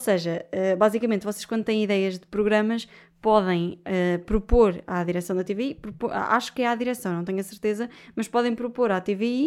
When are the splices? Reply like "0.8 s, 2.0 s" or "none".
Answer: none